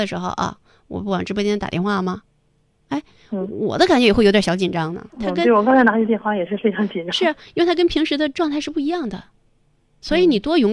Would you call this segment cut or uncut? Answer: cut